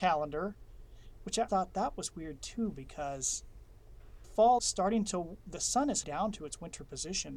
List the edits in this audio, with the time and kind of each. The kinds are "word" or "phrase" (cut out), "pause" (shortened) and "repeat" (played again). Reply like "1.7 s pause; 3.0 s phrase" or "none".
1.5 s word; 4.2 s word; 4.6 s word; 6.0 s word